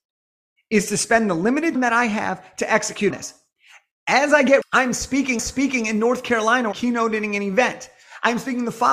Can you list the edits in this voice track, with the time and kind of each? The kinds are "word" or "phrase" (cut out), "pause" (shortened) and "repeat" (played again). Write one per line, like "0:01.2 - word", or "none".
0:01.8 - word
0:03.1 - word
0:04.6 - phrase
0:05.4 - repeat
0:06.7 - word